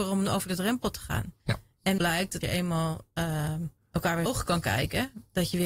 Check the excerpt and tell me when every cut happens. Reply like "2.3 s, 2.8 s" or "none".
1.4 s, 2.0 s, 2.4 s, 3.8 s, 4.3 s